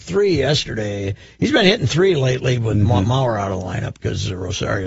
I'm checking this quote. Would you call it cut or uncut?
uncut